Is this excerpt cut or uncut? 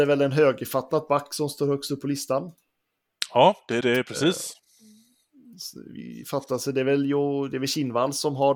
cut